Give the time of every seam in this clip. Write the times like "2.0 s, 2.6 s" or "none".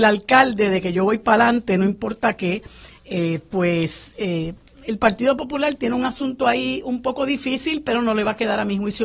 none